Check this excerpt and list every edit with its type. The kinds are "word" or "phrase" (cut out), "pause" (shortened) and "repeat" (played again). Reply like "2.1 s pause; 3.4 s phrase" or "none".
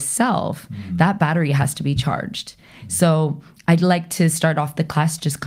none